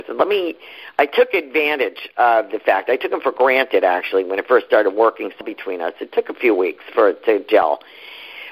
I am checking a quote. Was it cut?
yes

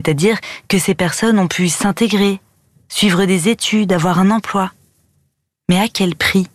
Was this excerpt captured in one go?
yes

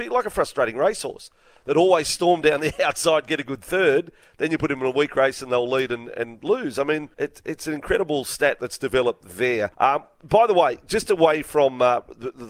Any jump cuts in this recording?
yes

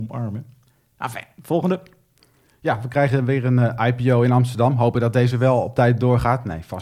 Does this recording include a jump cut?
no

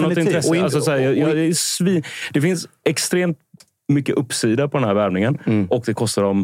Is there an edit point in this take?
no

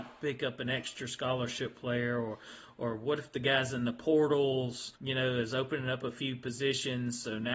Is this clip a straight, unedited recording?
no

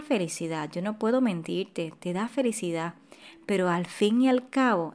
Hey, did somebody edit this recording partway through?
no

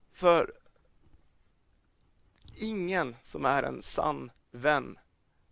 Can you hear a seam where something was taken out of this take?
no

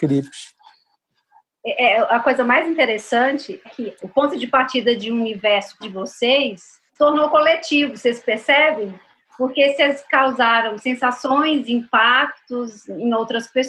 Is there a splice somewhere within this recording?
yes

